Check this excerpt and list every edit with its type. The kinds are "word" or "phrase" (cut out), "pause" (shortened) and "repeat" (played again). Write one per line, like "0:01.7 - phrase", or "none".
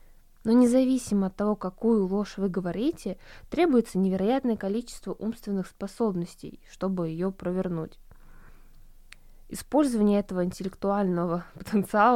none